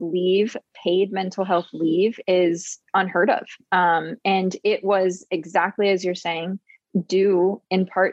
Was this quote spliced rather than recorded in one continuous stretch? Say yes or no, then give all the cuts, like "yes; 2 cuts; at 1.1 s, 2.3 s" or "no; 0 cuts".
yes; 1 cut; at 2.8 s